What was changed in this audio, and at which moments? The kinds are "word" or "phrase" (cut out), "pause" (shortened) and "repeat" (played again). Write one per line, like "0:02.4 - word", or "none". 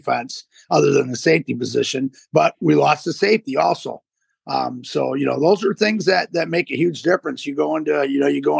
none